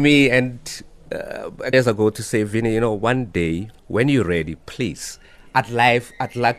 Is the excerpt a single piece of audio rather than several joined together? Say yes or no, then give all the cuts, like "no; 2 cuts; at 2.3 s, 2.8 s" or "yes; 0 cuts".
no; 3 cuts; at 1.7 s, 3.8 s, 4.6 s